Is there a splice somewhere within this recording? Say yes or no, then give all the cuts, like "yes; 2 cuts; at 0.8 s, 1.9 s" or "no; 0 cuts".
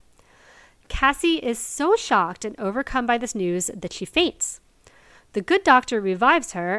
no; 0 cuts